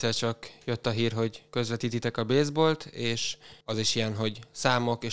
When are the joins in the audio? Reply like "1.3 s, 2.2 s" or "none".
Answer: 1.5 s, 3.6 s